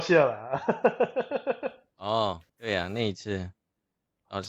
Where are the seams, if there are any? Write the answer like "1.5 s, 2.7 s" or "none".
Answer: 2.5 s